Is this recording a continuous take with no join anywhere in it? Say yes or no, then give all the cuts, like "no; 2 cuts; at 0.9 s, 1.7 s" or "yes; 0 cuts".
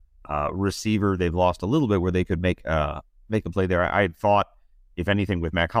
yes; 0 cuts